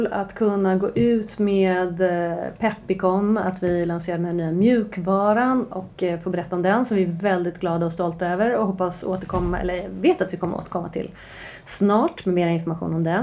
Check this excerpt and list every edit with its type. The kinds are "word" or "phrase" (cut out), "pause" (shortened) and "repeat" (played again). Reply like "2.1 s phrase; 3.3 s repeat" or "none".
none